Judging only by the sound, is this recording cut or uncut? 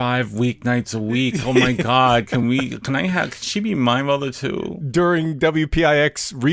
uncut